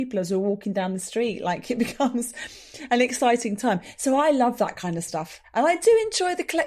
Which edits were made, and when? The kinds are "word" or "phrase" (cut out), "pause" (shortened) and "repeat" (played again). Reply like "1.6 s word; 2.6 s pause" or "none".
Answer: none